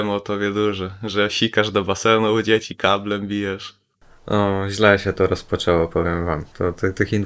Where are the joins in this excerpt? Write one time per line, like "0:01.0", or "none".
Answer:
none